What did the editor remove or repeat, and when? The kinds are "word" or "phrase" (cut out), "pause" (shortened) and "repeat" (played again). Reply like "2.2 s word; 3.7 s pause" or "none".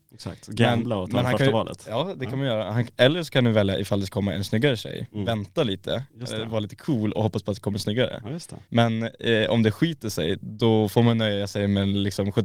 4.1 s word; 7.1 s word; 8.6 s pause

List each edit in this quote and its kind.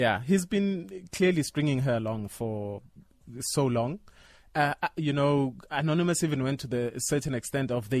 none

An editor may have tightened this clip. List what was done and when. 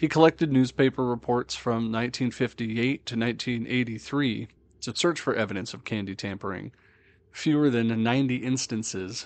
none

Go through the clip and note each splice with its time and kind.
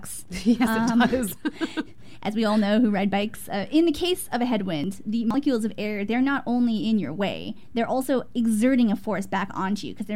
none

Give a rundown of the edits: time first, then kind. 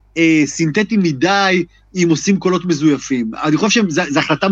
none

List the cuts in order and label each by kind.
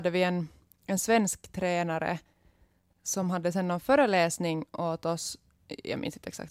none

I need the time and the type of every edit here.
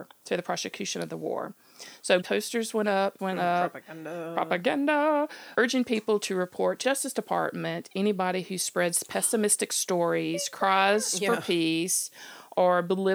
2.2 s word; 3.2 s word; 5.6 s word; 6.8 s word

